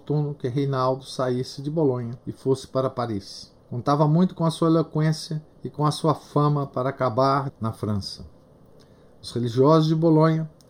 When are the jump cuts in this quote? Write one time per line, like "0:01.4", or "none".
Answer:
0:02.2
0:03.6
0:05.5
0:07.5